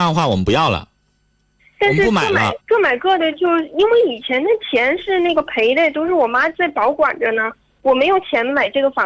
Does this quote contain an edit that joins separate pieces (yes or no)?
yes